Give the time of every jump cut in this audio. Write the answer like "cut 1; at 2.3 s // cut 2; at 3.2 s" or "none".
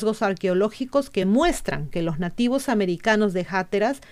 none